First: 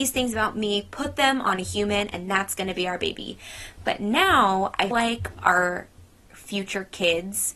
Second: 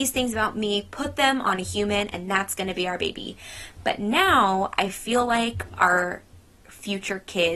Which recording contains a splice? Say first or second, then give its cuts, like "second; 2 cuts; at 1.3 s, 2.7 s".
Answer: first; 1 cut; at 4.9 s